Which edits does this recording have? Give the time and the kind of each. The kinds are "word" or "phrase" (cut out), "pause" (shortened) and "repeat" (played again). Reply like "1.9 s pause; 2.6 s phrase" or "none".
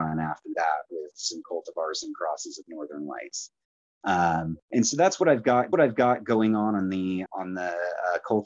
1.4 s word; 4.6 s pause; 5.7 s repeat; 7.3 s word